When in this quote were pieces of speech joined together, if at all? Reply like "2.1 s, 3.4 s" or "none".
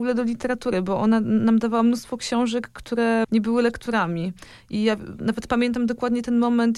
3.2 s